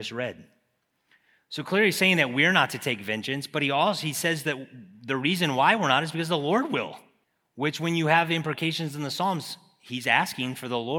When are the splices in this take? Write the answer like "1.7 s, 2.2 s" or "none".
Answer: 7.2 s